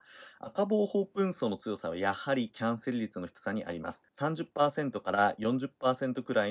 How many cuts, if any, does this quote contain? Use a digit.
1